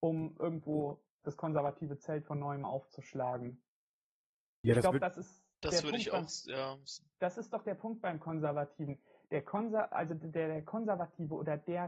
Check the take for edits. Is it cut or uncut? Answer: uncut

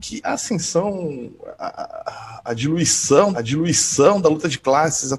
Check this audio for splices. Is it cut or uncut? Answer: cut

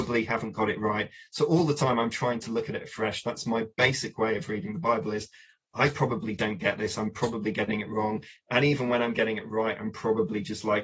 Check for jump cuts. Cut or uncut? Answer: uncut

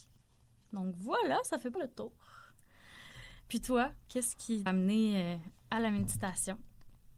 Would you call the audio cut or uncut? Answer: cut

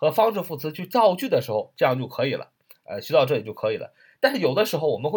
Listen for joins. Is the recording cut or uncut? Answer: uncut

